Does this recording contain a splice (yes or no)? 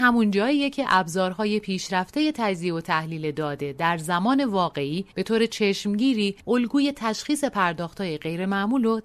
yes